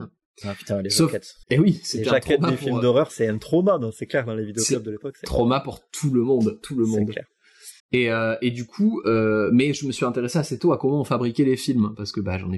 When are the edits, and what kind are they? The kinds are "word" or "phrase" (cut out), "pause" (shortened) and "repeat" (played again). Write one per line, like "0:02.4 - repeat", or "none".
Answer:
0:01.4 - pause
0:07.8 - pause